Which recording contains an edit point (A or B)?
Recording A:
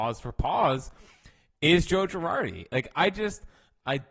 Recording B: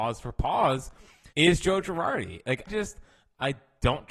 B